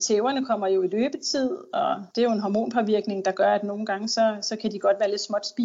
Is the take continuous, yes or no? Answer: no